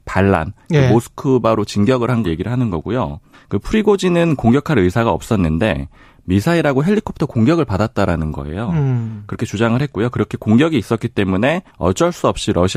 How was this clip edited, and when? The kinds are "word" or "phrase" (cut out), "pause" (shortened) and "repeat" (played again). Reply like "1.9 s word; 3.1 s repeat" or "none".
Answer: 2.2 s word; 3.3 s pause; 11.7 s pause